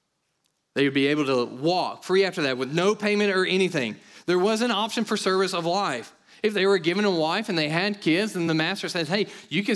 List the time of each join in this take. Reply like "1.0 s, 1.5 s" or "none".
none